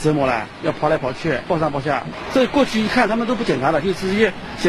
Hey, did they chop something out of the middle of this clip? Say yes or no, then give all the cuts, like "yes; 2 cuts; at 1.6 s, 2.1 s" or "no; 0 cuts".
no; 0 cuts